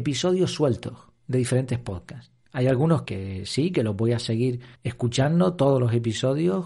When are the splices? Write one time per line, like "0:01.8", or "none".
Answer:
0:01.2
0:03.0
0:04.7